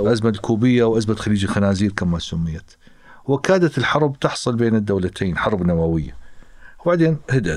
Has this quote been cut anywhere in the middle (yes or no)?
no